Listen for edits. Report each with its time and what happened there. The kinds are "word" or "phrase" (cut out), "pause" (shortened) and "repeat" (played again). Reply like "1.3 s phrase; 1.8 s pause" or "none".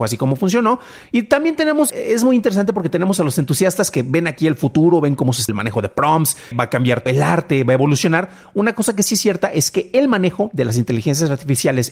1.9 s word; 5.5 s word; 6.5 s word; 7.1 s word